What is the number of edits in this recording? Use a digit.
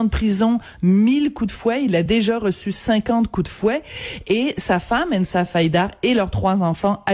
0